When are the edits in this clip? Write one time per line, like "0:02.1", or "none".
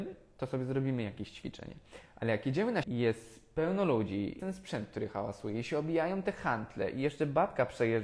0:02.8
0:04.4